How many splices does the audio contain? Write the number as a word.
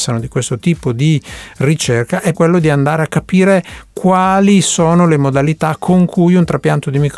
one